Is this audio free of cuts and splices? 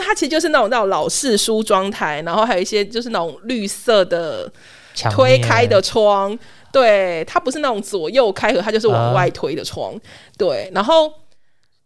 yes; 0 cuts

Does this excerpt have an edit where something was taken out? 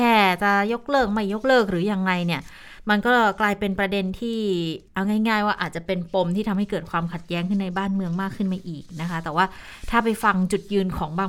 yes; 1 cut; at 4.9 s

